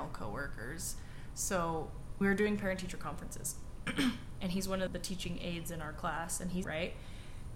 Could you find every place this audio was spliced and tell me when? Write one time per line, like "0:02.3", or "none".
0:02.2
0:04.9
0:06.6